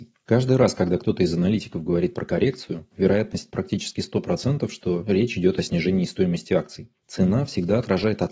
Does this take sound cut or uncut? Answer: uncut